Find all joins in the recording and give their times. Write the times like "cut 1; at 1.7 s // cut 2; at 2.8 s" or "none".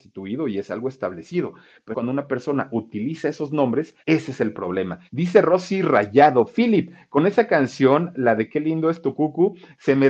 cut 1; at 1.9 s // cut 2; at 4.0 s // cut 3; at 5.1 s

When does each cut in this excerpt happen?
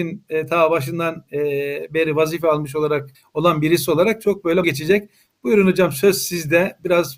cut 1; at 3.1 s // cut 2; at 4.6 s

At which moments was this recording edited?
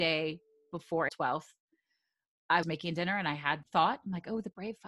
cut 1; at 1.1 s // cut 2; at 2.6 s // cut 3; at 3.6 s

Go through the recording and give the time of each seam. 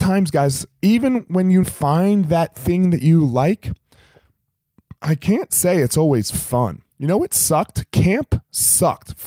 cut 1; at 1.6 s // cut 2; at 5.0 s // cut 3; at 6.9 s

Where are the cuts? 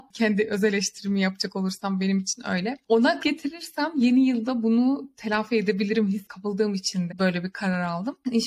cut 1; at 3.2 s // cut 2; at 7.1 s

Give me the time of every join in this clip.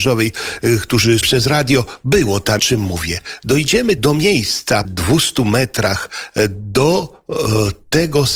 cut 1; at 1.2 s // cut 2; at 2.6 s // cut 3; at 4.0 s // cut 4; at 4.8 s

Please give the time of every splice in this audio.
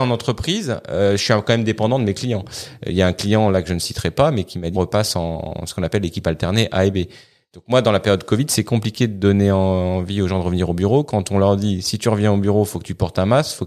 cut 1; at 4.8 s

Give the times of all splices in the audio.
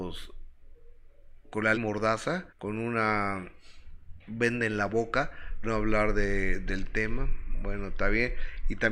cut 1; at 1.4 s // cut 2; at 1.7 s // cut 3; at 2.5 s // cut 4; at 5.6 s

